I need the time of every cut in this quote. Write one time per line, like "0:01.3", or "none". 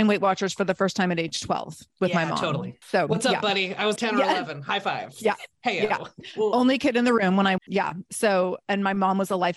0:01.9
0:04.0
0:07.6